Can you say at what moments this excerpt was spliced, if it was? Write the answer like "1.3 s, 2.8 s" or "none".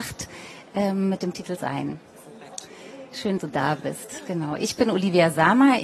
1.6 s, 3.4 s